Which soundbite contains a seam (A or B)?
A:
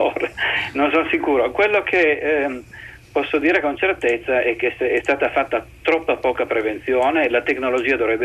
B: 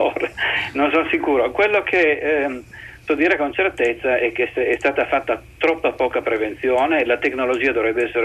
B